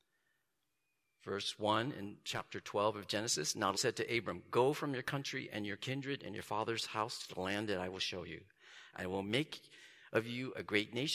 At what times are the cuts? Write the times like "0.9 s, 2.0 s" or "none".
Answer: 3.7 s